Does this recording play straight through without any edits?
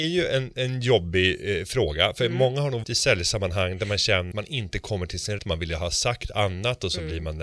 no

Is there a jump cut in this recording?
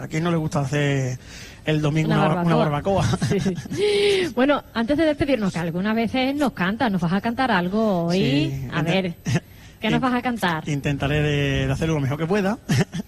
no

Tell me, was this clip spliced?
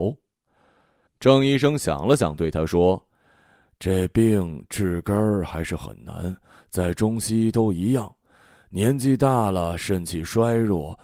no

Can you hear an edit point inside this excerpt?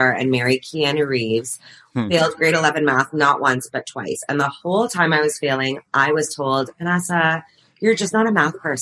no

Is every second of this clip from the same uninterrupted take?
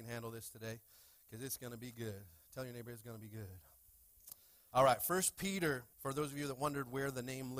no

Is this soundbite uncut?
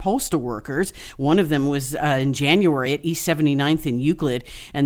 yes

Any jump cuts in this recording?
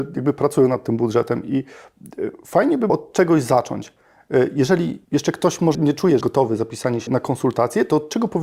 yes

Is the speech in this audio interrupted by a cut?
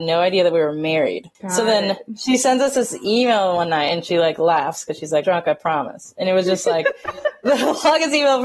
yes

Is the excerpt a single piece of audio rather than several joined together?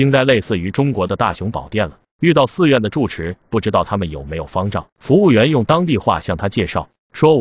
no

